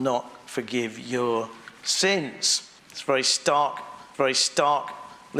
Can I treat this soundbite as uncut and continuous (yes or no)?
no